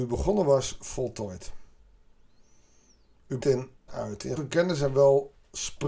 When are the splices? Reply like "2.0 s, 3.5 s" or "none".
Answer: 3.4 s, 3.9 s, 4.4 s

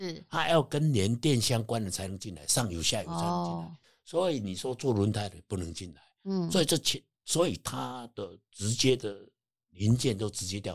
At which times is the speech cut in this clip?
none

